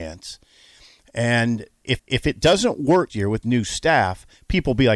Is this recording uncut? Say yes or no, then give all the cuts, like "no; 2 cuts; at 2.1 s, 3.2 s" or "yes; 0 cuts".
no; 3 cuts; at 2.0 s, 3.1 s, 3.4 s